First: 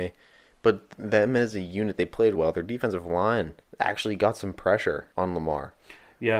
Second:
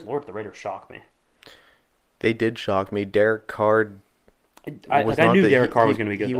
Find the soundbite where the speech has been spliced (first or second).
first